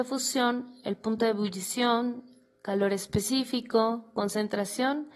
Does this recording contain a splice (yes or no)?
no